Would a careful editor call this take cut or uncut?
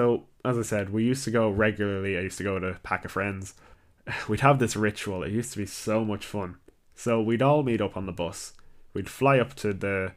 uncut